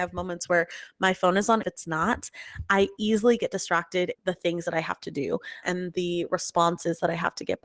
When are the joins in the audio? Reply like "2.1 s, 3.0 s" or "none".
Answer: 1.6 s, 4.1 s, 5.6 s